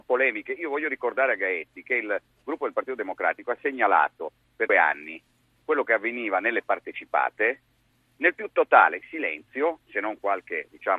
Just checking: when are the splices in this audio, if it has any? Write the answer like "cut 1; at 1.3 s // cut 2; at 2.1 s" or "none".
cut 1; at 4.7 s